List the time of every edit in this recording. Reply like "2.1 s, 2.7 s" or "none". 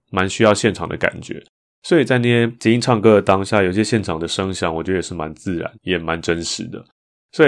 5.8 s